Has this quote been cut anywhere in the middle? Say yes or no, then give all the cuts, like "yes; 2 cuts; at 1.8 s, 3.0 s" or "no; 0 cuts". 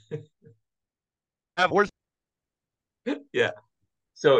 yes; 1 cut; at 1.7 s